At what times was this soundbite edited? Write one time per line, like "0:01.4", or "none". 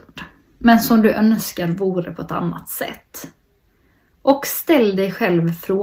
none